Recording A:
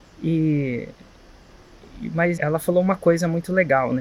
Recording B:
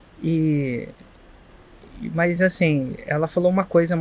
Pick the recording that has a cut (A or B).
A